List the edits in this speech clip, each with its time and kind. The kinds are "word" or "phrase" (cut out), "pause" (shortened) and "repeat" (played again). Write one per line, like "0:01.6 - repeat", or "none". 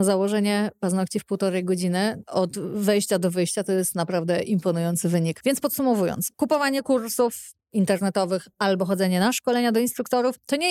none